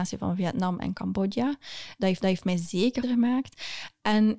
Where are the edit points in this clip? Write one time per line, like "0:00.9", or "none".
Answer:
0:02.2
0:03.0